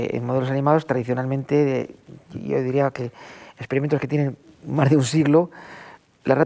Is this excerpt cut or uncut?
uncut